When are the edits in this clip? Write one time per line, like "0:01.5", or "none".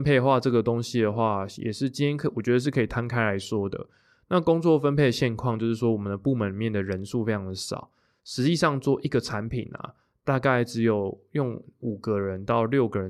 none